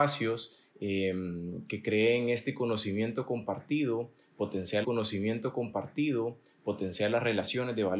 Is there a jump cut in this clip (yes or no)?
yes